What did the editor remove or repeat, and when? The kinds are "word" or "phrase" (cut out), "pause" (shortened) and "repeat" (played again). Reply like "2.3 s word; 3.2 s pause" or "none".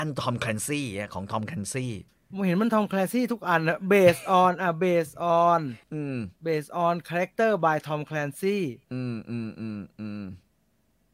2.1 s pause; 5.8 s pause; 6.4 s pause; 8.8 s pause

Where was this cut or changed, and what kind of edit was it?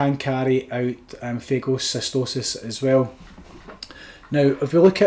none

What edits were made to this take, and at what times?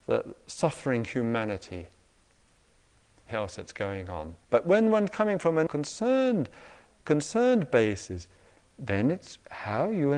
3.3 s phrase; 4.4 s pause; 5.7 s word

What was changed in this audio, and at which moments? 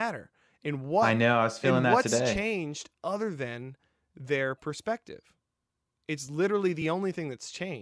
none

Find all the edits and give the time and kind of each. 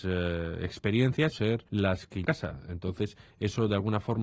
1.3 s phrase; 1.7 s pause; 2.2 s phrase

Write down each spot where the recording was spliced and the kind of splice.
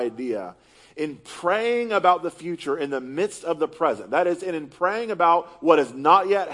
none

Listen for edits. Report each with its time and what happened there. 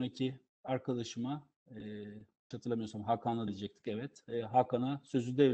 2.5 s word; 3.5 s word

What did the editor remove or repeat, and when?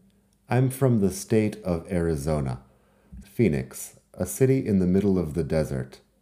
3.2 s word

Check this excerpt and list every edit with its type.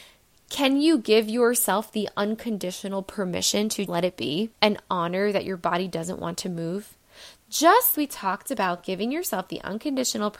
3.9 s word; 4.5 s pause; 7.9 s word

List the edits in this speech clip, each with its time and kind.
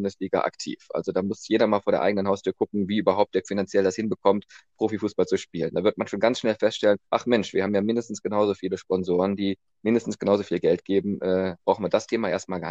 3.4 s word; 7.1 s pause; 11.6 s word

